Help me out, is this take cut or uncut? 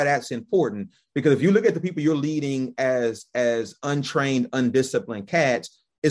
uncut